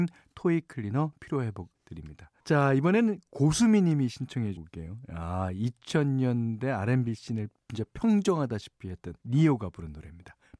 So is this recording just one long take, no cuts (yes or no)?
no